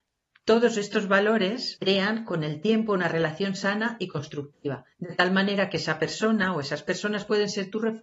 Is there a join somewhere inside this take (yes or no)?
yes